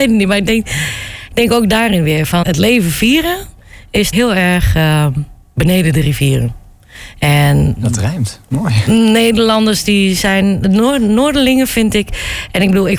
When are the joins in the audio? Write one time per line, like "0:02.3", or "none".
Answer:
0:02.4
0:04.1

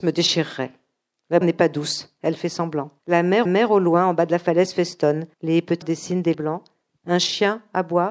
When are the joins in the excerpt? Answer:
0:01.4
0:03.0
0:03.5
0:05.3
0:05.8
0:06.3

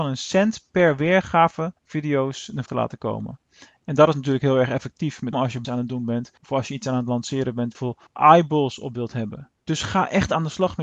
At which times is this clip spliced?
0:01.8
0:02.7
0:05.3
0:05.6
0:06.4
0:07.7
0:08.1
0:09.6

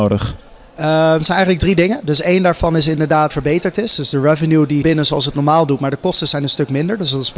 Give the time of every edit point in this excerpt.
0:03.3
0:04.8

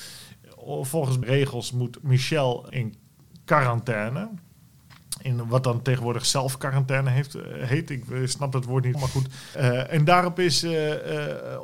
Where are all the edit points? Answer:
0:01.2
0:02.7
0:08.9

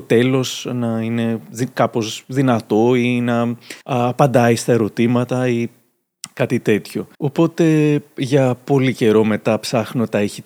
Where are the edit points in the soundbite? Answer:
0:03.8
0:07.1

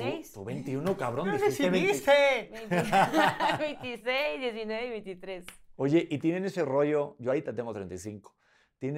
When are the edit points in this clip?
none

